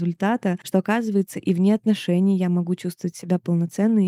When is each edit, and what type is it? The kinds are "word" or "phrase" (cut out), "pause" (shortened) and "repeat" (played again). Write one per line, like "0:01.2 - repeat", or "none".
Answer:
none